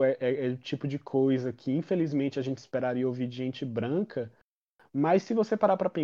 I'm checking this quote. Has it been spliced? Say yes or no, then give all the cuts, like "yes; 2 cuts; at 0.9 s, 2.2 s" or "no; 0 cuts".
no; 0 cuts